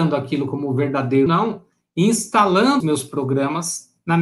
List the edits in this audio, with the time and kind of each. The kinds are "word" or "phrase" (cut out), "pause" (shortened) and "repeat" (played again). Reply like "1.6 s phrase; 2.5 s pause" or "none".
1.3 s word; 2.8 s word